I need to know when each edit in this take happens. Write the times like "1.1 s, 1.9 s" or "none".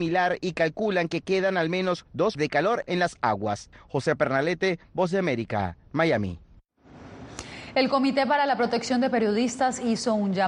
2.3 s, 2.8 s